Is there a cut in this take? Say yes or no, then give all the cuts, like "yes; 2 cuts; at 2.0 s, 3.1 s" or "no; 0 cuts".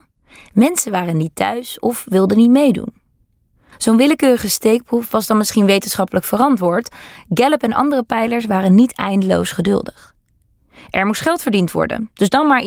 no; 0 cuts